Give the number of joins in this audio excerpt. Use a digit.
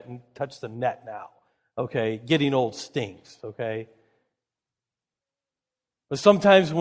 0